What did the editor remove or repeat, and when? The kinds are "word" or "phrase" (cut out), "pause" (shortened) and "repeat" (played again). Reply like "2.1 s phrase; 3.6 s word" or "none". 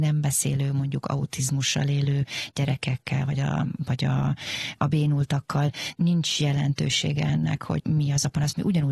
none